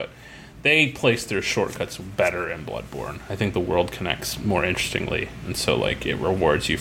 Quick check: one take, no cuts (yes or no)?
yes